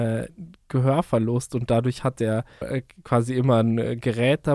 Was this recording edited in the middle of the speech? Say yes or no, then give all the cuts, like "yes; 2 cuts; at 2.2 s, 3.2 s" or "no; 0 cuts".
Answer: yes; 1 cut; at 2.6 s